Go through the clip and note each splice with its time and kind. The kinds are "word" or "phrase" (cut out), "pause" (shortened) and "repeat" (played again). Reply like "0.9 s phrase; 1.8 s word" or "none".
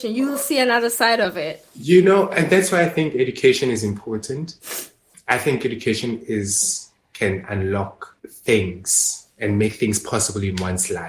5.1 s pause; 8.2 s pause

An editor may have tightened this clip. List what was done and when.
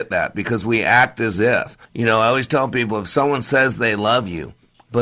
1.8 s pause

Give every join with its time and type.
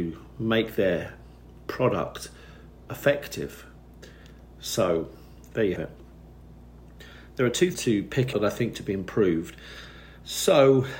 2.9 s word; 5.8 s word; 7.7 s phrase; 8.3 s word; 8.7 s word

